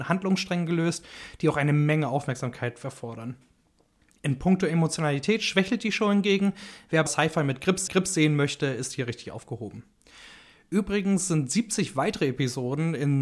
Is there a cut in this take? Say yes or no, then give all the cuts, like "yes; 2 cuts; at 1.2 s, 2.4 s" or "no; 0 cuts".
yes; 2 cuts; at 7.1 s, 7.9 s